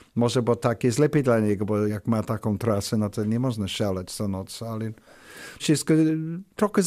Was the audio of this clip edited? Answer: yes; 2 cuts; at 1.9 s, 5.6 s

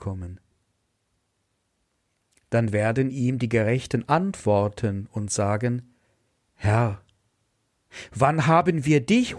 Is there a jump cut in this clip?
no; 0 cuts

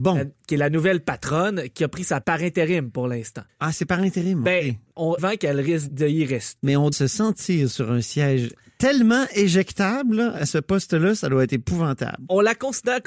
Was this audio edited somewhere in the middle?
yes; 5 cuts; at 2.2 s, 5.2 s, 5.9 s, 6.9 s, 10.4 s

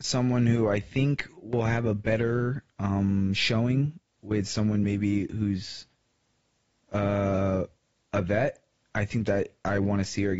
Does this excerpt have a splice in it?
no; 0 cuts

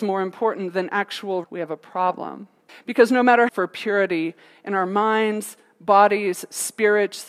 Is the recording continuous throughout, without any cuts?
no; 3 cuts; at 1.4 s, 2.7 s, 3.5 s

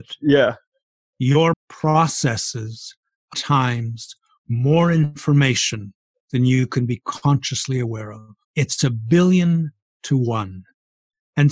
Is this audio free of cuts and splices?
no; 3 cuts; at 1.5 s, 3.3 s, 8.4 s

